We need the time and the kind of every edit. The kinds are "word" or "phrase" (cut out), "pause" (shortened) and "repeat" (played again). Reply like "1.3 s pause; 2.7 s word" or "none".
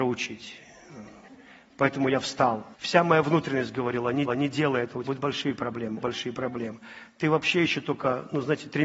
1.3 s pause; 2.7 s pause; 4.3 s repeat; 5.0 s word; 6.0 s word